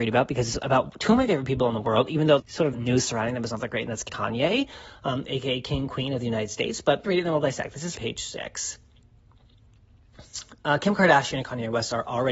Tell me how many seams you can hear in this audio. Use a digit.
5